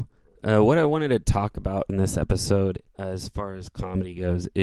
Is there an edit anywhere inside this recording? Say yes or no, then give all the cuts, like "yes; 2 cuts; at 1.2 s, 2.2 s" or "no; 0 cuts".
yes; 2 cuts; at 1.9 s, 2.9 s